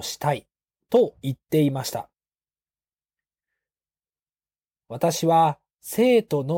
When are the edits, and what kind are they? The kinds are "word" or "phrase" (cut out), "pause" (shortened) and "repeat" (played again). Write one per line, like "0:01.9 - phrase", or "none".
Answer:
none